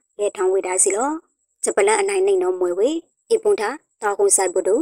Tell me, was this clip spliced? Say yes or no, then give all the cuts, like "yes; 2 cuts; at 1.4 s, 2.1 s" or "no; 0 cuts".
no; 0 cuts